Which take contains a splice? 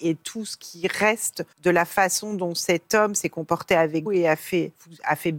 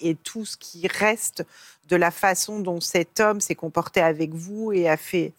first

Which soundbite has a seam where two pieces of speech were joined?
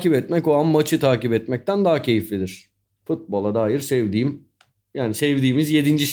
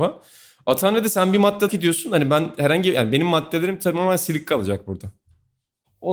second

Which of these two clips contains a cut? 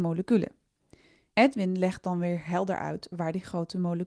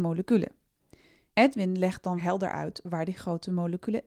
second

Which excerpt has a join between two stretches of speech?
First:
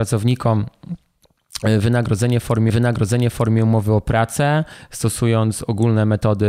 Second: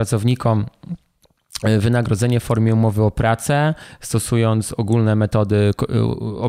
first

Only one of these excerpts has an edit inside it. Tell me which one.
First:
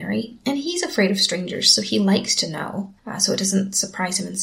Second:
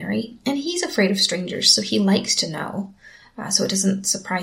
first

